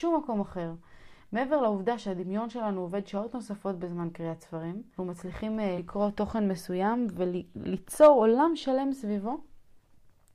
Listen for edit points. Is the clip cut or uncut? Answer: cut